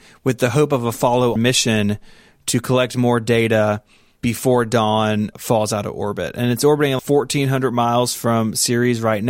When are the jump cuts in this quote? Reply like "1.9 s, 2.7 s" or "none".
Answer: 1.4 s, 4.2 s, 5.3 s, 7.0 s